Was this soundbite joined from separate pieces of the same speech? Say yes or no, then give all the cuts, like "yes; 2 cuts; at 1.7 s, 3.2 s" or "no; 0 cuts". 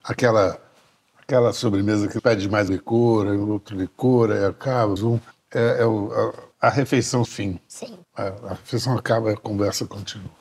yes; 7 cuts; at 2.2 s, 2.7 s, 5.0 s, 5.3 s, 6.5 s, 7.3 s, 8.0 s